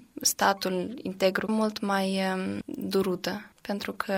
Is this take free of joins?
no; 1 cut; at 1.5 s

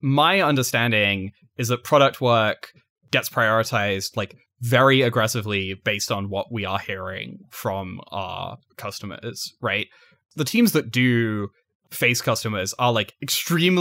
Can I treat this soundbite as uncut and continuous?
yes; 0 cuts

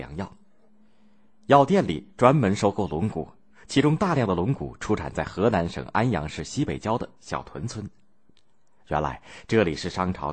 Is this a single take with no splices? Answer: yes; 0 cuts

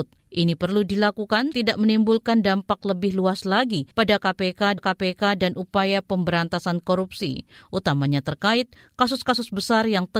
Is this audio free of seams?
no; 3 cuts; at 1.5 s, 3.9 s, 4.8 s

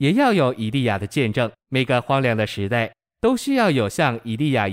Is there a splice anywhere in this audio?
yes; 1 cut; at 1.6 s

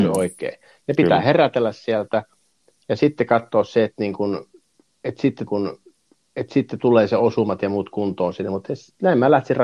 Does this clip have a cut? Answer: yes; 1 cut; at 5.5 s

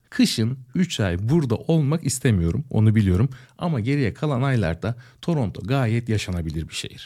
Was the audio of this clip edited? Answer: no; 0 cuts

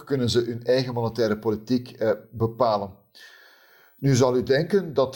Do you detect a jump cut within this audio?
no; 0 cuts

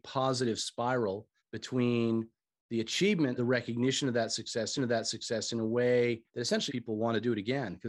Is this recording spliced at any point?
yes; 5 cuts; at 1.4 s, 3.4 s, 4.8 s, 6.3 s, 6.7 s

